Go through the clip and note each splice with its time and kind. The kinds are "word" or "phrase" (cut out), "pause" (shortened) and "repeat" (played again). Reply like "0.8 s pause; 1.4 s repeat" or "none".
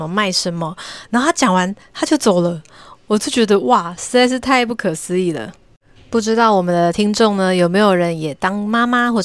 none

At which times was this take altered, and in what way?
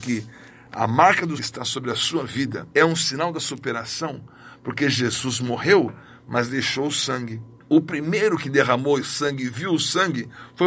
1.4 s word; 2.7 s pause; 7.6 s pause

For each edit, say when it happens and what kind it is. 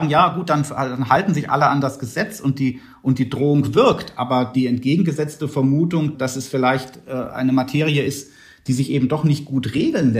none

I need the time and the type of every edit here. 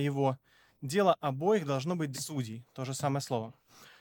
2.1 s phrase

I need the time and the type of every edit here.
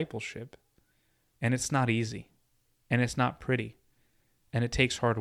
none

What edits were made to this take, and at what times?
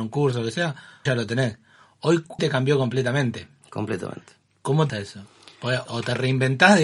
1.1 s word; 2.4 s word; 4.9 s word; 5.9 s word

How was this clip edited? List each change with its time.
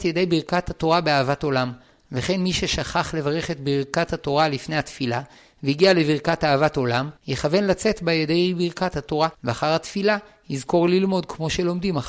7.2 s pause; 9.3 s pause

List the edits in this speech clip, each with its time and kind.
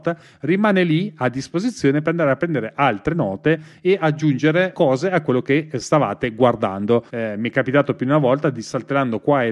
4.7 s word; 7.1 s pause

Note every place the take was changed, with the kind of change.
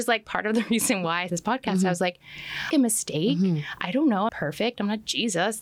1.3 s word; 2.7 s phrase; 4.3 s word

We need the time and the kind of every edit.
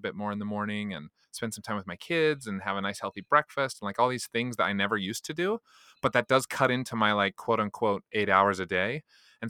1.2 s pause

